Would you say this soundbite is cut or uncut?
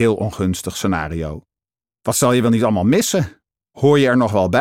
uncut